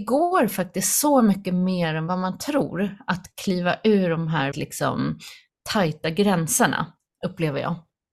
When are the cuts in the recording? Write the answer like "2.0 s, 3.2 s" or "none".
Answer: 4.5 s